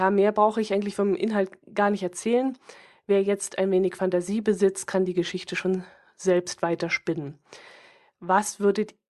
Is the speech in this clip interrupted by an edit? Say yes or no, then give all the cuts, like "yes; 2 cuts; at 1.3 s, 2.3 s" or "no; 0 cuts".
no; 0 cuts